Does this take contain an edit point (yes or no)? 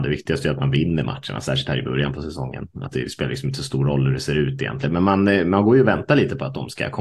no